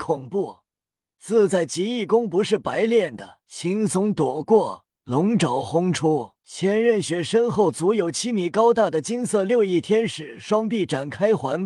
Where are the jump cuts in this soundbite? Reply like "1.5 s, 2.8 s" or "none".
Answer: 3.4 s, 4.9 s, 6.4 s